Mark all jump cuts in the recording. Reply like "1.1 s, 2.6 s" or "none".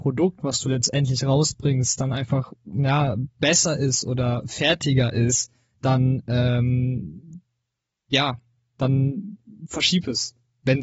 none